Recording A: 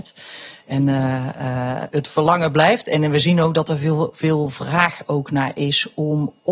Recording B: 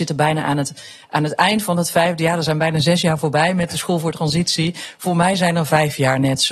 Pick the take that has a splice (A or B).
A